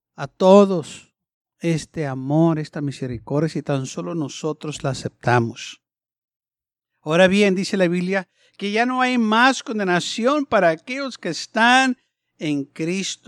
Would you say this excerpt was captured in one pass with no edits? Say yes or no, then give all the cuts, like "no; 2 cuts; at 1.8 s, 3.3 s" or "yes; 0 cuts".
yes; 0 cuts